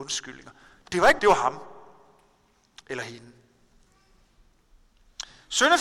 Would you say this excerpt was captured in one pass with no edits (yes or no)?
no